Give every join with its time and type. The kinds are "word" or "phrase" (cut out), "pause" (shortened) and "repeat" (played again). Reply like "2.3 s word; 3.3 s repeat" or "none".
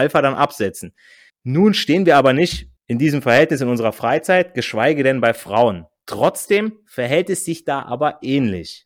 1.3 s pause; 2.8 s pause